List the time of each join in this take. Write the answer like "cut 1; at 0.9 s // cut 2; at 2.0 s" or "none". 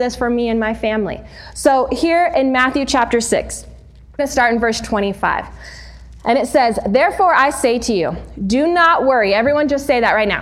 cut 1; at 4.2 s